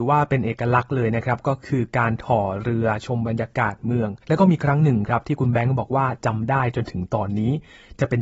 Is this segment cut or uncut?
cut